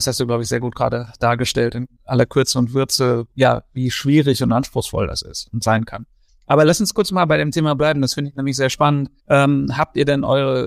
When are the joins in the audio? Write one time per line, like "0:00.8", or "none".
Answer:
0:02.0
0:03.3
0:06.3
0:09.2